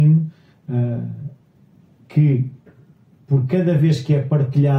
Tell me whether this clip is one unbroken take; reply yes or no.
yes